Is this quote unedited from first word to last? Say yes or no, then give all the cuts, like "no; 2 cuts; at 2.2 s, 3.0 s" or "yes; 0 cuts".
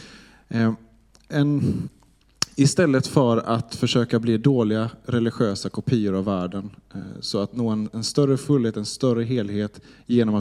yes; 0 cuts